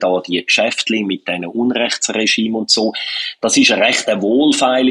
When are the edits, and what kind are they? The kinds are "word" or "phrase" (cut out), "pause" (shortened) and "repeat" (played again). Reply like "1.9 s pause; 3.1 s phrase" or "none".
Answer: none